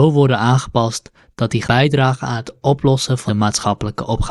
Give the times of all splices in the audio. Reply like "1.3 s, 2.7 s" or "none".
1.6 s, 3.3 s

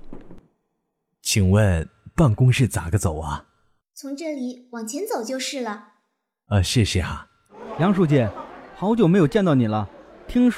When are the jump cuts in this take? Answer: none

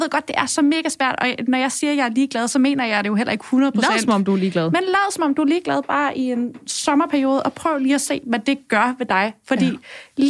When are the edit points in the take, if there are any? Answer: none

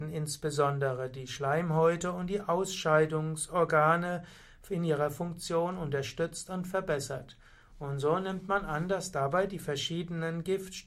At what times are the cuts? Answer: none

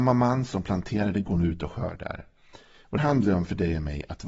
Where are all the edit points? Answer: 3.0 s

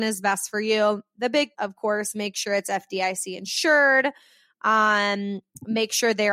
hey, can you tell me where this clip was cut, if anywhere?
1.5 s

